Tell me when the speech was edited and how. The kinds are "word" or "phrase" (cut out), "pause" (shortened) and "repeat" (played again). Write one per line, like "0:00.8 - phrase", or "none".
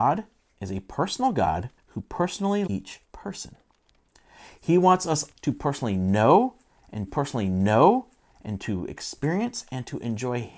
0:01.8 - pause
0:02.7 - word
0:03.0 - pause
0:05.3 - word
0:07.1 - repeat